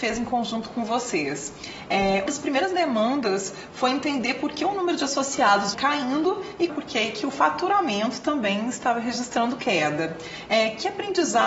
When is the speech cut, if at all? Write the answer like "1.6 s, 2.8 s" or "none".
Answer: 2.3 s, 5.7 s, 6.7 s

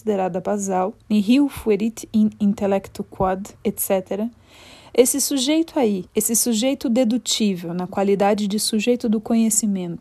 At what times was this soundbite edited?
1.0 s, 3.5 s, 6.1 s

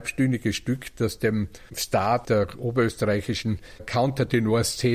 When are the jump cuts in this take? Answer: none

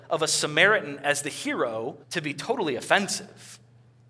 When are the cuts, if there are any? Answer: 2.0 s

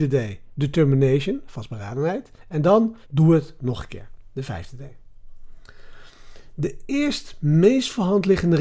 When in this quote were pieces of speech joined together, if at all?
2.4 s, 3.0 s

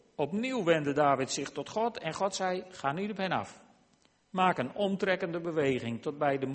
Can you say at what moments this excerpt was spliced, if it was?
none

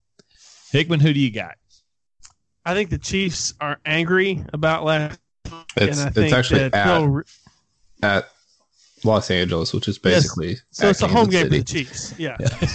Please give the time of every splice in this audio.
none

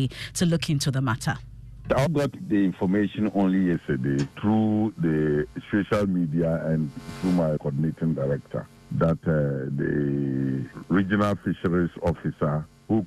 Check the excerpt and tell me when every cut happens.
2.1 s, 4.3 s, 7.1 s, 7.6 s

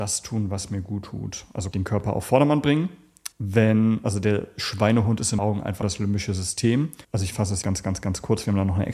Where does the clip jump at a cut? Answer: 1.7 s, 3.3 s, 5.4 s, 5.8 s, 7.0 s, 7.6 s

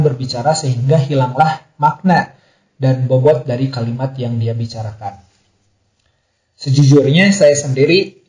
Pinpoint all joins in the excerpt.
none

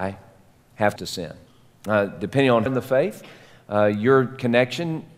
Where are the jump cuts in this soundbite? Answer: 1.0 s, 1.5 s, 2.7 s

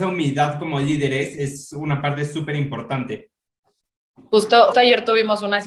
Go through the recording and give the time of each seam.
4.7 s

